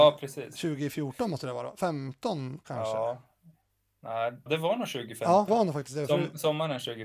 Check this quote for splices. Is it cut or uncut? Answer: cut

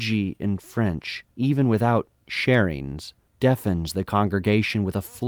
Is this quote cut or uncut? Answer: cut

